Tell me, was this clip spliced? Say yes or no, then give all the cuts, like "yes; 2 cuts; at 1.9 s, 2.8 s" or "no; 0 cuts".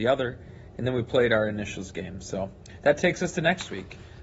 no; 0 cuts